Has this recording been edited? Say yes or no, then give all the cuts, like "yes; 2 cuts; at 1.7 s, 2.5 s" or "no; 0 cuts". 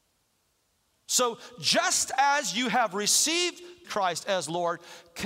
yes; 1 cut; at 3.8 s